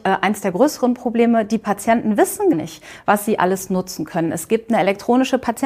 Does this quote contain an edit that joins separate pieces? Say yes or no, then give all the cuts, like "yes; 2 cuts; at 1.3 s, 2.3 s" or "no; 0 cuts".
yes; 1 cut; at 2.5 s